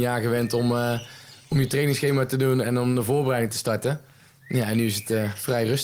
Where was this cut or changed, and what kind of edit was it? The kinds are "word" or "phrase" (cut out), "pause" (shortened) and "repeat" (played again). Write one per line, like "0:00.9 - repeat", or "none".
none

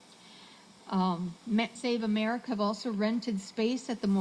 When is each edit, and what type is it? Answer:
0:01.8 - word
0:02.5 - word

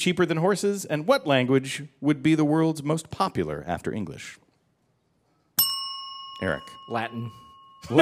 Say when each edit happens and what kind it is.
none

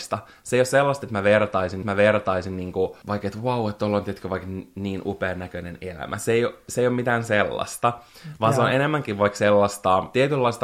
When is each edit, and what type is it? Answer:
0:01.8 - repeat

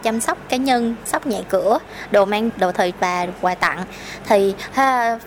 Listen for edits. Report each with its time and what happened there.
0:01.1 - word
0:02.5 - word
0:02.9 - word

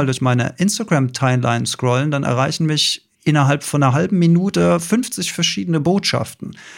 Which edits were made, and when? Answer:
0:03.1 - pause

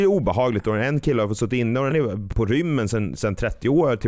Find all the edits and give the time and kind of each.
0:01.9 - word

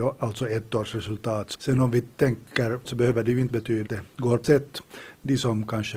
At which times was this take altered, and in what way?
0:01.5 - word
0:02.8 - word
0:03.5 - word
0:03.9 - word
0:04.4 - word

